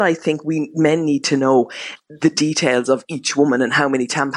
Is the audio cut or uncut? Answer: uncut